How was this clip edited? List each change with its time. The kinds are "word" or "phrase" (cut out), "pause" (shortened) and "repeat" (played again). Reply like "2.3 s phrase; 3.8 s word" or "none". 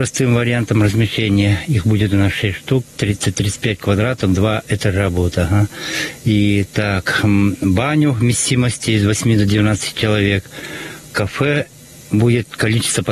none